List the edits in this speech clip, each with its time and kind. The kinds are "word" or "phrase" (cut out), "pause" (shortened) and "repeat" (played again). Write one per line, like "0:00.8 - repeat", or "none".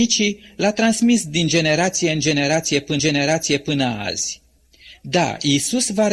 0:03.0 - repeat

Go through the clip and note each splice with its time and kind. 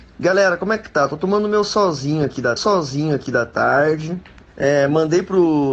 0:02.6 - repeat

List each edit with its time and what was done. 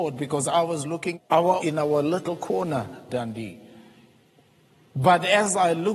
0:01.1 - word
0:01.6 - phrase
0:03.1 - word

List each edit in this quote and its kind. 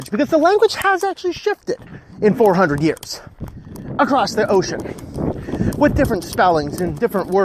none

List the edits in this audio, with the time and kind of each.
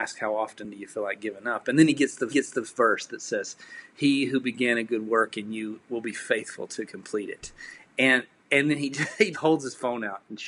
0:02.3 - repeat
0:09.3 - word

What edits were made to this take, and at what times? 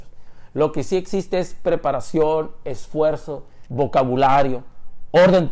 0:03.7 - word

